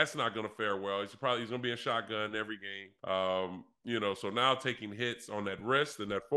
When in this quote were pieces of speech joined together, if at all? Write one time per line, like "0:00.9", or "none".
0:03.0